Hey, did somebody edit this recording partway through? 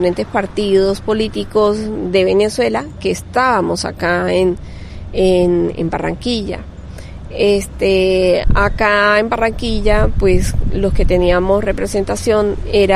no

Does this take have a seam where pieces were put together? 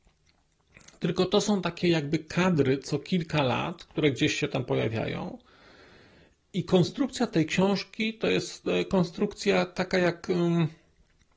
no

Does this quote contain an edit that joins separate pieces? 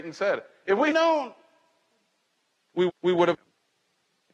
yes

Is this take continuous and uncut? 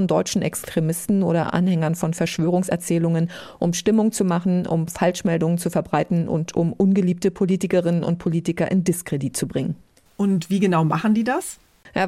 yes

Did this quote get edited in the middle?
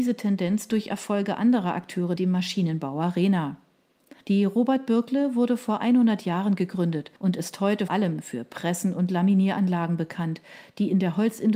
yes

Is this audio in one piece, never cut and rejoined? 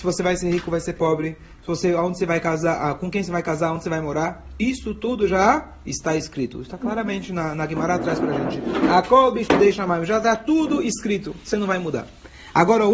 yes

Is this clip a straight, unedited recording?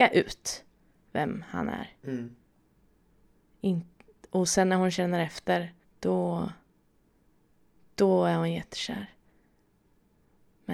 no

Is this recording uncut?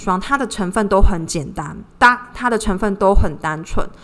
no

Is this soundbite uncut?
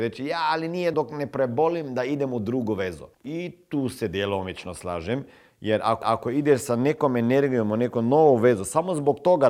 no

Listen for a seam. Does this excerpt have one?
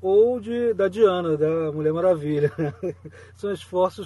no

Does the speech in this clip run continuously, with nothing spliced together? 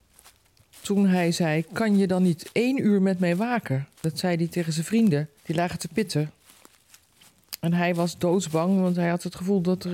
no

